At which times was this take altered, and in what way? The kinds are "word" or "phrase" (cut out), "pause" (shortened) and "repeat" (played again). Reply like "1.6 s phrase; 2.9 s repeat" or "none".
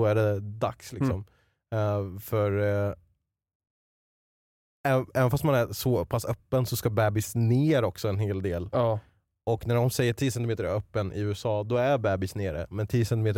none